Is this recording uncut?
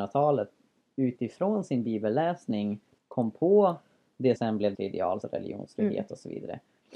no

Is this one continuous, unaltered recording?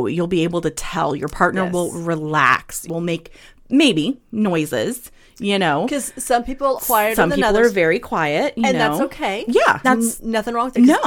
no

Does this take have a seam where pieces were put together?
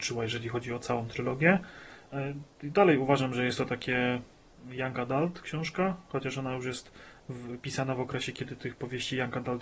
no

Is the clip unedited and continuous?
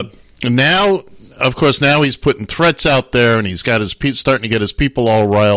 yes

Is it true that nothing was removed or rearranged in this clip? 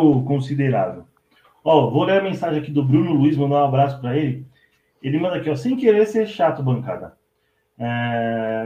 yes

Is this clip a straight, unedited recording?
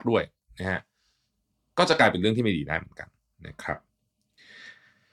yes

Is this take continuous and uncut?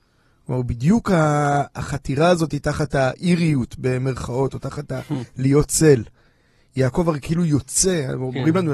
yes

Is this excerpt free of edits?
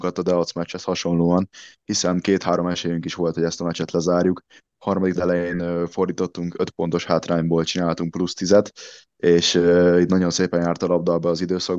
no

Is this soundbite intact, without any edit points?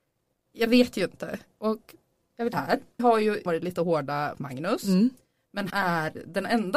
no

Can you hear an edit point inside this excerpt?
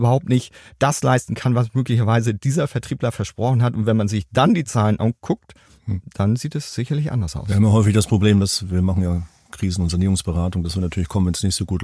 no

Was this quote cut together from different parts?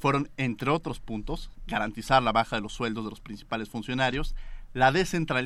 no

